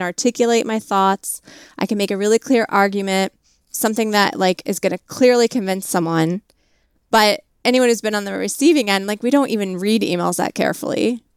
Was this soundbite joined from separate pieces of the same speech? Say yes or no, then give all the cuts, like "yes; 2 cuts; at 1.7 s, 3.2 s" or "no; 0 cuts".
no; 0 cuts